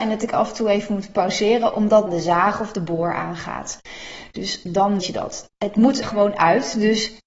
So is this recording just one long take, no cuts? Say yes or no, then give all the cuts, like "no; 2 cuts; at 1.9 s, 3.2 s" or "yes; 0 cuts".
no; 3 cuts; at 2.1 s, 5.0 s, 6.0 s